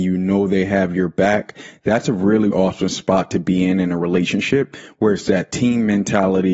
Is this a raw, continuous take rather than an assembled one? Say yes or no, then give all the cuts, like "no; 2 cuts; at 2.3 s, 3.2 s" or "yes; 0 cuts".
no; 1 cut; at 2.5 s